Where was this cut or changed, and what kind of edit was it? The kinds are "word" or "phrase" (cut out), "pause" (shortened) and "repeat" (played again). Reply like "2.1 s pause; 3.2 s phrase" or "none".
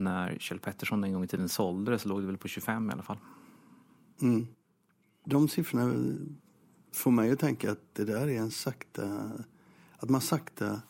none